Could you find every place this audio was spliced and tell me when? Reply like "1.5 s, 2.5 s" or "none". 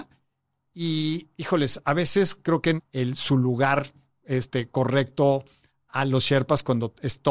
2.8 s

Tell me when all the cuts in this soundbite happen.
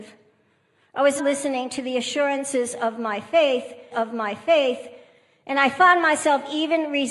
1.2 s, 3.9 s

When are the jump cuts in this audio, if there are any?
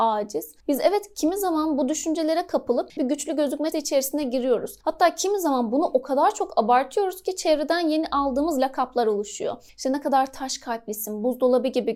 3.0 s, 3.7 s

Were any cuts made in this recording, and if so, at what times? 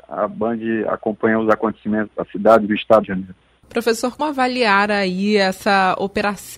2.1 s, 3.0 s, 4.2 s

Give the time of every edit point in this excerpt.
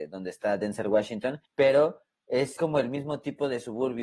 1.5 s, 2.6 s

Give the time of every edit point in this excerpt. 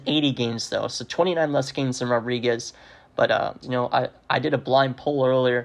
3.6 s

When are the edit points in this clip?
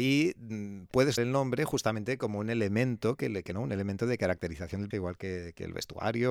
1.2 s, 3.5 s, 4.9 s

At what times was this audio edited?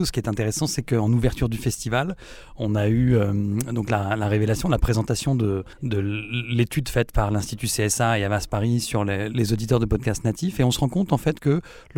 5.7 s

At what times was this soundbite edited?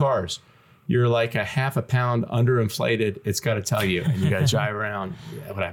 none

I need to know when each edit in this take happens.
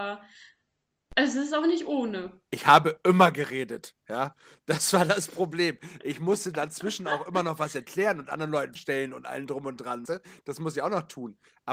8.8 s, 10.1 s

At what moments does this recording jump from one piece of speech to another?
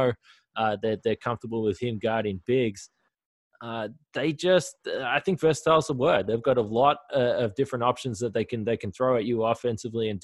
none

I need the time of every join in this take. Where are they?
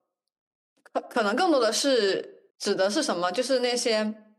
2.5 s

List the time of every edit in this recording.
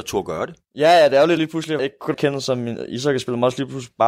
1.4 s, 1.8 s, 2.1 s

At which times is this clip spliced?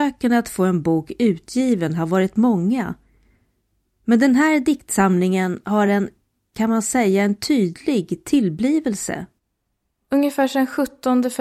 none

